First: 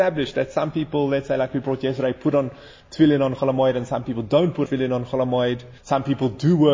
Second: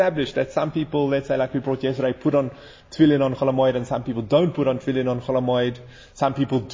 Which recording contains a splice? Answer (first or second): first